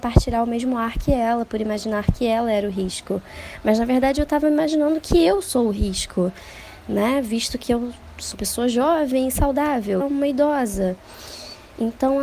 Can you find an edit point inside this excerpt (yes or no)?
yes